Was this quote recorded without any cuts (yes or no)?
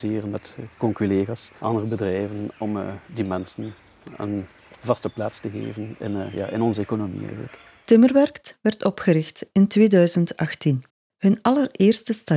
yes